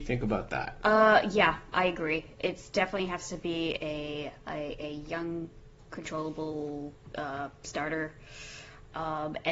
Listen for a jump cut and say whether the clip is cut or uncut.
uncut